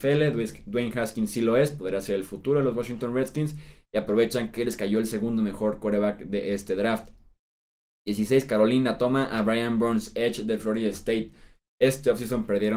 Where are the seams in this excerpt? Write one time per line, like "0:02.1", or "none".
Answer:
none